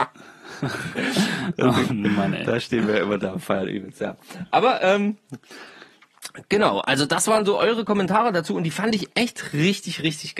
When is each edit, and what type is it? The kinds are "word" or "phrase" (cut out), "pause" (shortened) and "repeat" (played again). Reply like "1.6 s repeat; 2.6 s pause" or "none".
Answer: none

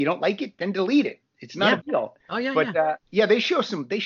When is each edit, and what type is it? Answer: 1.8 s word; 2.2 s pause; 3.0 s pause

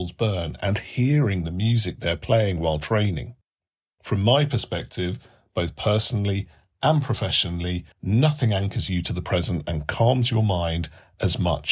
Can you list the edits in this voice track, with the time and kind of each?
7.9 s pause

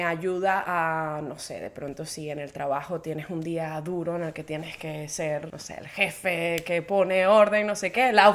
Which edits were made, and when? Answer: 5.5 s word

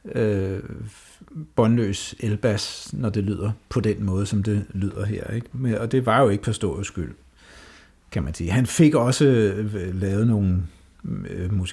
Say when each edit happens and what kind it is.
none

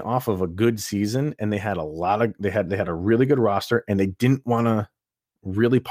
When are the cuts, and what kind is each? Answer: none

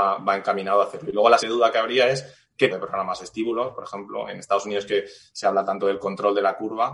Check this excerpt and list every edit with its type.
1.4 s word; 2.7 s word

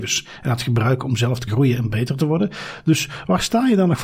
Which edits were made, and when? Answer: 1.5 s word

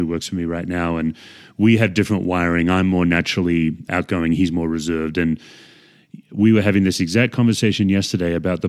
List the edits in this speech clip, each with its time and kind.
3.9 s word

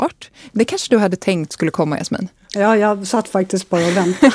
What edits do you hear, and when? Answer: none

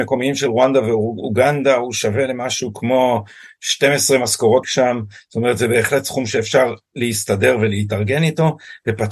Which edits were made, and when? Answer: 4.6 s phrase

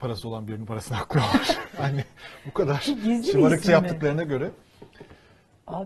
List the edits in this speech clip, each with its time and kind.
none

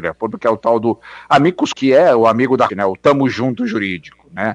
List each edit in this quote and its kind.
1.7 s word; 2.7 s word

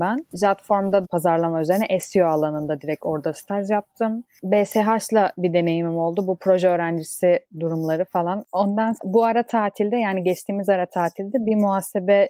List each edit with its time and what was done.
1.0 s phrase; 9.0 s phrase

